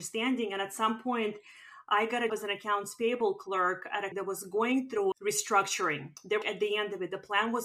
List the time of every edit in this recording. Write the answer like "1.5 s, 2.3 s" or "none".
2.3 s, 4.1 s, 5.1 s, 6.4 s